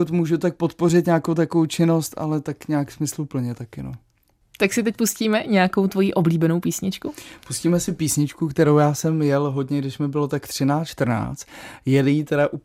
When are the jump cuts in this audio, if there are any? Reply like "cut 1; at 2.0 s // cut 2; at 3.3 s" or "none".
none

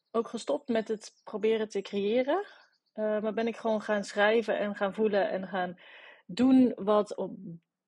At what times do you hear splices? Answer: none

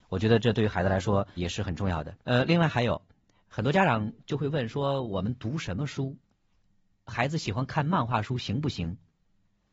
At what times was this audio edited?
cut 1; at 1.4 s // cut 2; at 2.2 s

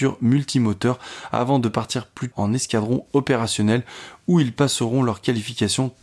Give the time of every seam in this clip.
cut 1; at 2.3 s

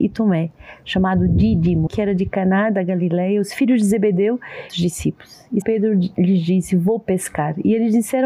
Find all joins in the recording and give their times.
cut 1; at 1.9 s // cut 2; at 4.7 s // cut 3; at 5.6 s

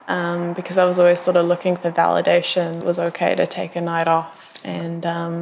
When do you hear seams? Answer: cut 1; at 2.8 s

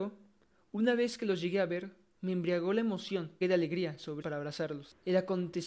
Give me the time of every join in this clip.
cut 1; at 3.4 s // cut 2; at 4.2 s

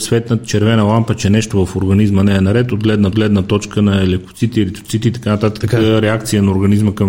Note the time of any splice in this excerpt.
cut 1; at 3.1 s

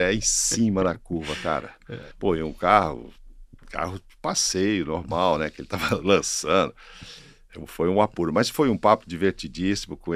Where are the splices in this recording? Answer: cut 1; at 2.1 s

